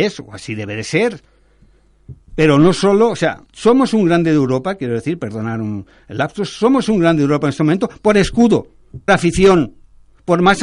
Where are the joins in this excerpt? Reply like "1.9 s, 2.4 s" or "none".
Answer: 2.2 s, 3.5 s, 9.1 s